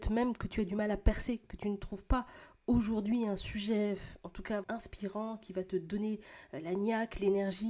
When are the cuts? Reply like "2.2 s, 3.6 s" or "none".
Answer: 4.6 s